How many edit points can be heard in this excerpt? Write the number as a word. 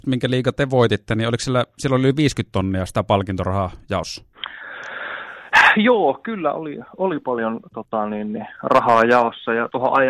one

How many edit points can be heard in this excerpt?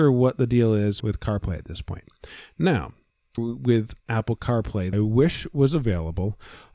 four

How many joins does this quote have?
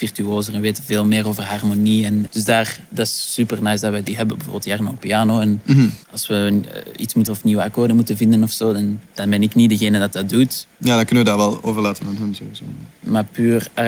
five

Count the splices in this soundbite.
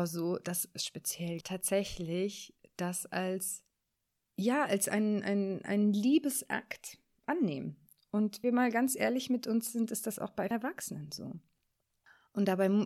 three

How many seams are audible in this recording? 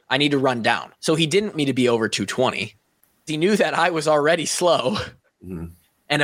three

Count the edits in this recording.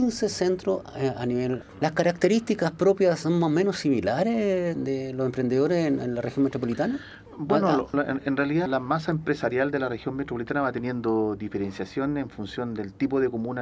five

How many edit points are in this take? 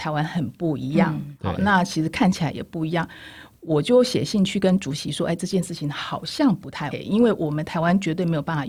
one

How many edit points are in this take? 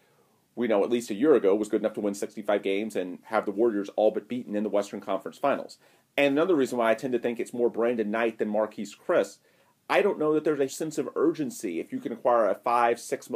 one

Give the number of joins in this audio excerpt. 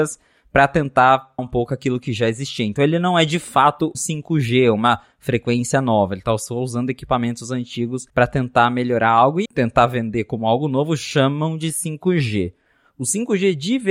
four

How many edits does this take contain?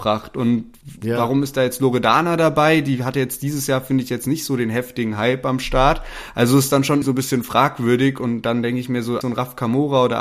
two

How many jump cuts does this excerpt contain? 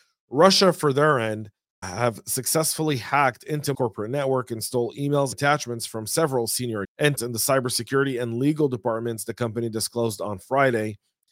five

